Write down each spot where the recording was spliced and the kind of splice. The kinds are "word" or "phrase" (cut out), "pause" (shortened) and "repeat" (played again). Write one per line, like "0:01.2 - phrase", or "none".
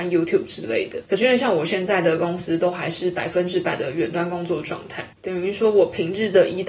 0:01.1 - pause
0:05.1 - pause